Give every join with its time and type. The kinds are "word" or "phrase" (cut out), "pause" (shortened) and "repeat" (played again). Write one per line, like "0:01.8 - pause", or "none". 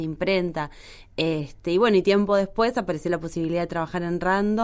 none